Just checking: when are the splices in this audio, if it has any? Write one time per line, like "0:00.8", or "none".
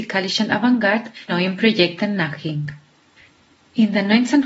0:01.3